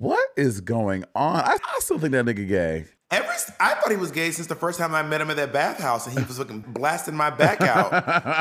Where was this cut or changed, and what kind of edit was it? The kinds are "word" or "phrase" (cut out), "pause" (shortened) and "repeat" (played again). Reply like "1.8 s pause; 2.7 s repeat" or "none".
1.6 s word; 6.6 s word

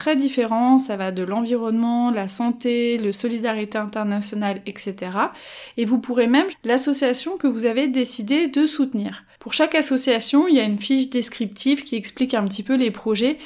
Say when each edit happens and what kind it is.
3.1 s phrase; 6.5 s word

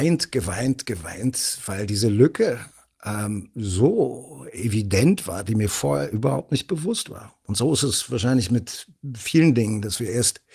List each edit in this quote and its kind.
none

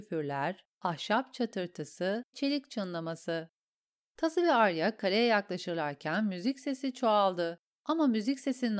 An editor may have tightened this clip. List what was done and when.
2.3 s word

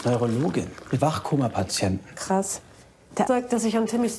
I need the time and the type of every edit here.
1.0 s word; 3.3 s word

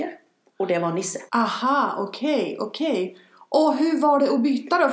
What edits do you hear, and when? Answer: 1.3 s pause

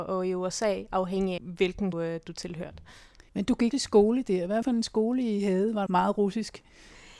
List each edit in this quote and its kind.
1.4 s word; 1.9 s phrase; 3.3 s pause; 3.7 s word; 4.6 s phrase; 5.9 s phrase

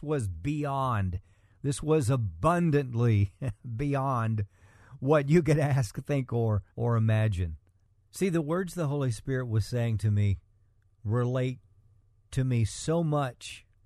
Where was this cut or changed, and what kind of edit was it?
6.7 s pause

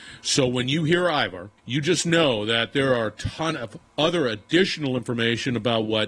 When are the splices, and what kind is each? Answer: 1.6 s pause

